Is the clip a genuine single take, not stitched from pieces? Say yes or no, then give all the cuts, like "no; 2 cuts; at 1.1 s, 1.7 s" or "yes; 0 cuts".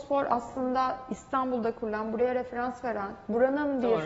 yes; 0 cuts